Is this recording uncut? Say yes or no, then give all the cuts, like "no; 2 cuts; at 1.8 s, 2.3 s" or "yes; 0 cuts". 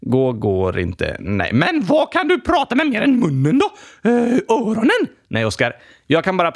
yes; 0 cuts